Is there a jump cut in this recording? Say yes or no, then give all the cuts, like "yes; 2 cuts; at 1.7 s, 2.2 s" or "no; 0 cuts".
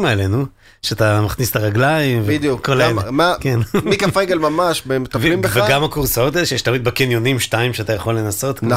no; 0 cuts